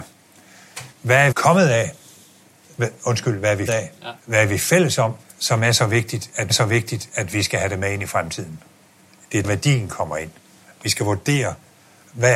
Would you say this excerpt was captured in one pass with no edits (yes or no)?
no